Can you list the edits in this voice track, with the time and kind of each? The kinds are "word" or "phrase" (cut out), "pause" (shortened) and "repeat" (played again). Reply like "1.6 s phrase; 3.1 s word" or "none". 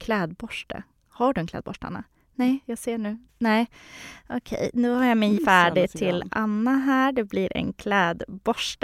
3.3 s pause; 5.4 s word